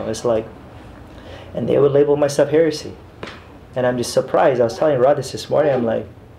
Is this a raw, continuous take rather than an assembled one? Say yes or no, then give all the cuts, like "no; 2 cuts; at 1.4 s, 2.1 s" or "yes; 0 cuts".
yes; 0 cuts